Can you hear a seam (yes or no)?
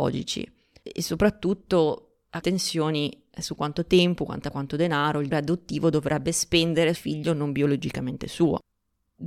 yes